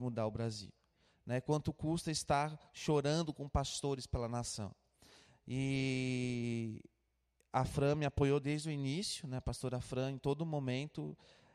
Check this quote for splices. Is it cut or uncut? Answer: uncut